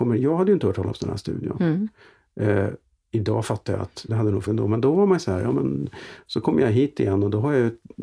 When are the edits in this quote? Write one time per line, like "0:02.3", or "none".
0:04.1
0:04.5